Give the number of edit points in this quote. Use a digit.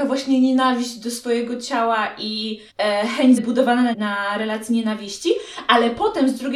3